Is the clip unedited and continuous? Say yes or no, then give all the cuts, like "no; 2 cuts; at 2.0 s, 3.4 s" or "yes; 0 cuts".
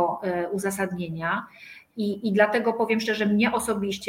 yes; 0 cuts